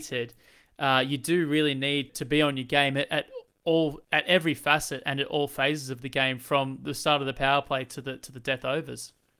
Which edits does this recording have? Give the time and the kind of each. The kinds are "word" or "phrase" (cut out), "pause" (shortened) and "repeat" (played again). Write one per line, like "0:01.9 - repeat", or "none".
0:02.1 - word
0:04.0 - pause